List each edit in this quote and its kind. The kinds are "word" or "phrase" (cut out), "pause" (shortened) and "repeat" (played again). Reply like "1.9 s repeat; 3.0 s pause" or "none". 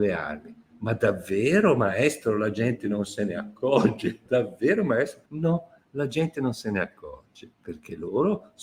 4.3 s pause; 5.3 s pause; 7.5 s pause